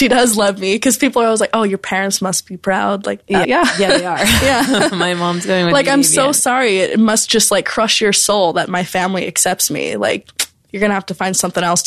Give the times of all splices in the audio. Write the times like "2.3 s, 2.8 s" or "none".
3.4 s